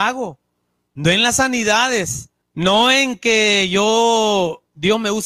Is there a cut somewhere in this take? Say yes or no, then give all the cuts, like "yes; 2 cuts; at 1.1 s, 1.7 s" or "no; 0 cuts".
yes; 1 cut; at 2.4 s